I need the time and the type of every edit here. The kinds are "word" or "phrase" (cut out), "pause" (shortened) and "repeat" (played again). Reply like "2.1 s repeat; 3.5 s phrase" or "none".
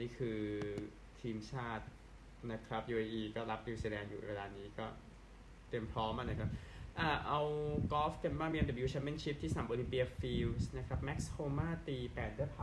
none